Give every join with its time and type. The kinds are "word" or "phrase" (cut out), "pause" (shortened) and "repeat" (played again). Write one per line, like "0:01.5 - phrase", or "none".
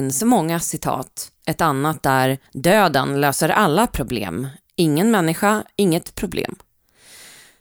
0:01.4 - pause
0:02.5 - pause